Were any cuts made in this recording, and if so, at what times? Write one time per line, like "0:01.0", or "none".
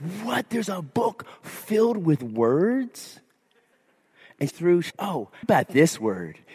0:04.5
0:04.9
0:05.4

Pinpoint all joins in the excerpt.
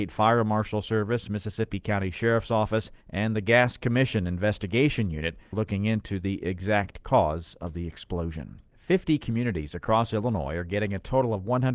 0:03.0
0:05.5
0:08.7

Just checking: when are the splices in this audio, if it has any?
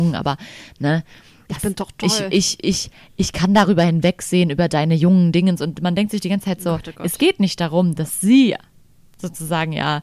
none

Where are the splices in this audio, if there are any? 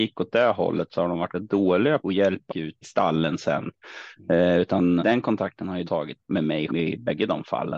0:01.3
0:02.0
0:02.5
0:02.8
0:05.0
0:05.9
0:06.2
0:06.7

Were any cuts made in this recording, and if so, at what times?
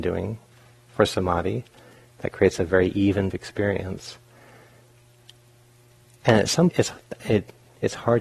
0:03.3
0:06.7

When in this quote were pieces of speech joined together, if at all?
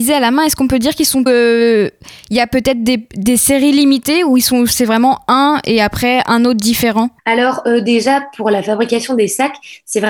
0:01.3
0:07.2

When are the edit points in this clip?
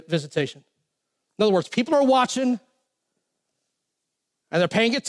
none

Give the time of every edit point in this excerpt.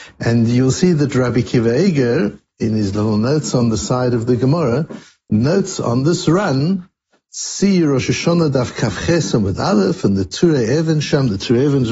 none

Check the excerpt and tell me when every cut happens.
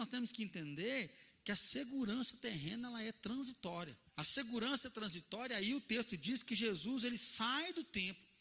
0:04.1

